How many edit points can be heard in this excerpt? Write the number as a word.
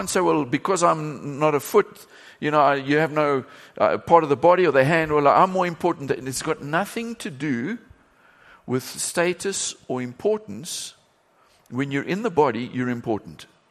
zero